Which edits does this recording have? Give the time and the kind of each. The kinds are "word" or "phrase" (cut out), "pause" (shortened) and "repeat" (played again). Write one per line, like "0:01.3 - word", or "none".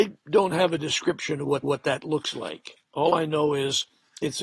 0:01.6 - repeat

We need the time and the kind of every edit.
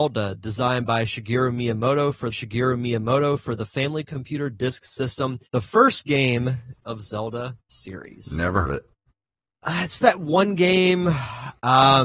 0:02.3 - repeat
0:05.5 - pause
0:06.8 - phrase
0:08.6 - word
0:09.1 - pause

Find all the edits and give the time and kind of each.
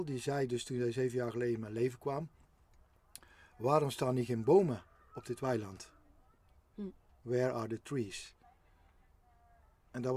none

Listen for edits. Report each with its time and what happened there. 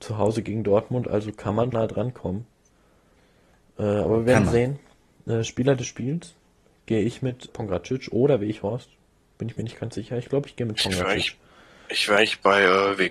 0:01.7 - word
0:07.5 - word

